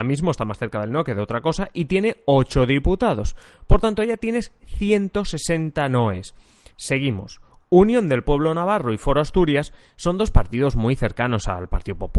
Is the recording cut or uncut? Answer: uncut